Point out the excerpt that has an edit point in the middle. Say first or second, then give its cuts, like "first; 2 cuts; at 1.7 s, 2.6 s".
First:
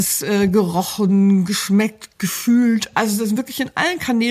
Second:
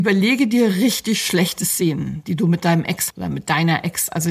second; 1 cut; at 3.1 s